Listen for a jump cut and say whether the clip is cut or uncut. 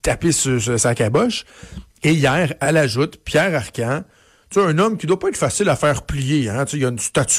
uncut